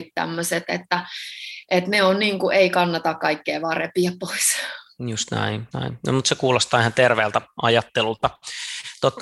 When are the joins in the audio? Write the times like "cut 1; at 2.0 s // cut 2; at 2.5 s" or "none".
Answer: cut 1; at 5.7 s